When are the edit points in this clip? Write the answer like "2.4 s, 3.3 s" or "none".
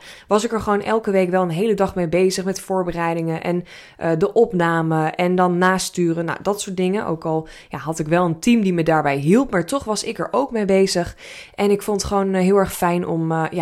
none